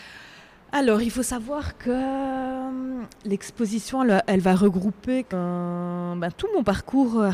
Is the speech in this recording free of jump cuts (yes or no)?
no